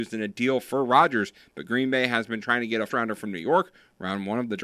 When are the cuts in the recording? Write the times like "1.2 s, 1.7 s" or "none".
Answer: 2.9 s